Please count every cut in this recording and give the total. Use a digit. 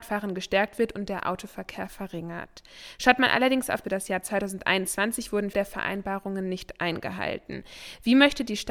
2